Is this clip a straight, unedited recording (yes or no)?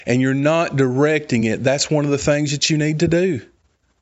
yes